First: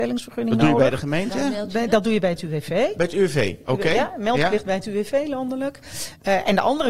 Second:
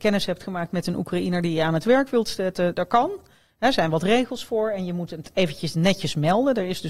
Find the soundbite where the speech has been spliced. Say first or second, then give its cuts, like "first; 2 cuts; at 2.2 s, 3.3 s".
second; 1 cut; at 2.7 s